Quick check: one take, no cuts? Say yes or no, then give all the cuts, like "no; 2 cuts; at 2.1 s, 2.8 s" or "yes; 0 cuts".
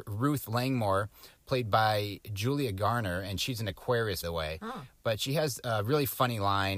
no; 1 cut; at 4.2 s